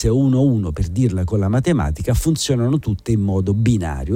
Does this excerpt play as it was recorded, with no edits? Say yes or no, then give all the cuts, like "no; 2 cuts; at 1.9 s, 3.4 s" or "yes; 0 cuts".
yes; 0 cuts